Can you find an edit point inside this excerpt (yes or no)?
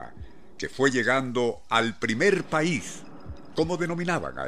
no